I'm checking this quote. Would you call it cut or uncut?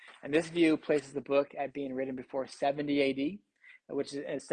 uncut